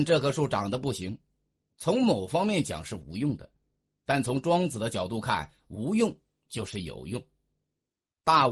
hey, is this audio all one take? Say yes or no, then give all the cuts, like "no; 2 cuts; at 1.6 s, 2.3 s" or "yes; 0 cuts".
yes; 0 cuts